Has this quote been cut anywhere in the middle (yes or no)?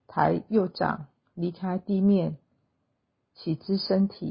no